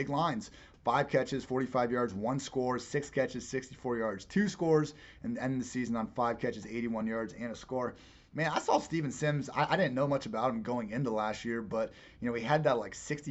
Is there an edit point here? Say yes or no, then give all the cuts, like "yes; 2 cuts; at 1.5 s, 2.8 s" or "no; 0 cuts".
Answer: no; 0 cuts